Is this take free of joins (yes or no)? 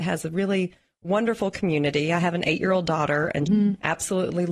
no